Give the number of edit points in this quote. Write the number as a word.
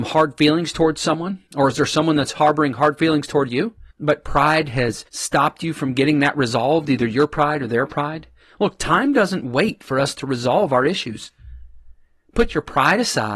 three